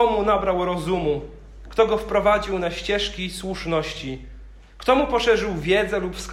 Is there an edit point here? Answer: no; 0 cuts

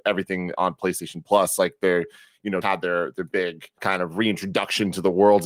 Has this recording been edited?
yes; 2 cuts; at 2.6 s, 3.8 s

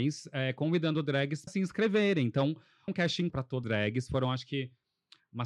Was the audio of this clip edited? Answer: yes; 4 cuts; at 1.5 s, 2.9 s, 3.3 s, 3.6 s

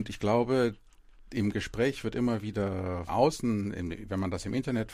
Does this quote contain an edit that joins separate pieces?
yes; 1 cut; at 3.1 s

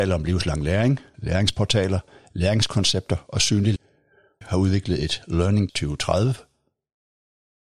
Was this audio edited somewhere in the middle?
yes; 4 cuts; at 1.1 s, 3.8 s, 4.4 s, 5.7 s

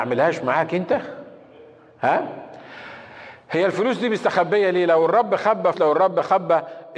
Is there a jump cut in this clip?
yes; 1 cut; at 5.7 s

